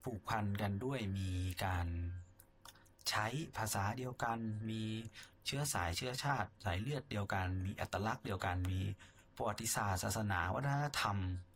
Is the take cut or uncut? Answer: cut